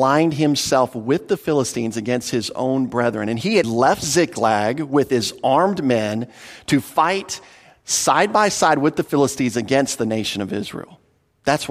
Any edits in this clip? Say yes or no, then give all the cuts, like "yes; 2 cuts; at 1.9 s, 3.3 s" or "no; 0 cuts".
yes; 1 cut; at 3.6 s